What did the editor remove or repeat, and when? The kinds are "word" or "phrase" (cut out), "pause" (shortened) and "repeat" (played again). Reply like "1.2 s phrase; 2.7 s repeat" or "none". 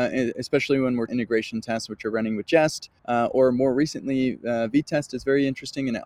1.1 s phrase; 3.0 s pause

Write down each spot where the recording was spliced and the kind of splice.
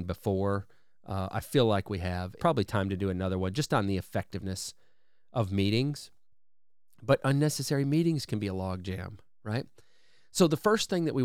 2.4 s phrase

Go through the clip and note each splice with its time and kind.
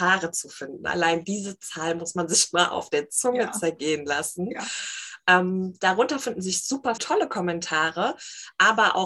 7.0 s word

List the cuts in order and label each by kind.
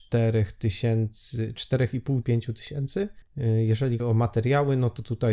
2.2 s word; 4.0 s word

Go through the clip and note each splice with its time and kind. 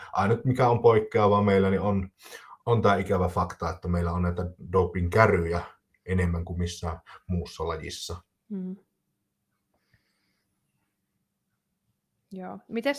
2.6 s pause

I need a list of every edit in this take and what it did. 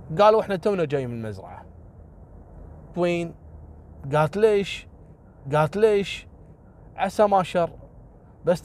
2.9 s word; 5.4 s repeat

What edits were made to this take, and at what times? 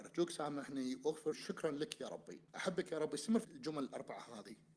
1.3 s word; 2.5 s pause; 3.4 s word

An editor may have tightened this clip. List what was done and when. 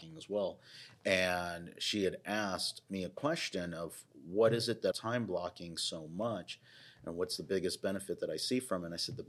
4.9 s phrase

